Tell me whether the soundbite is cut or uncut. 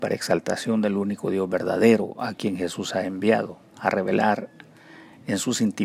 cut